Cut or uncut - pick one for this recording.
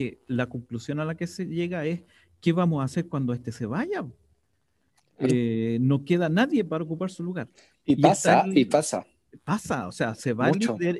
uncut